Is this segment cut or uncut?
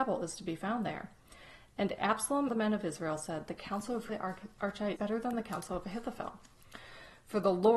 cut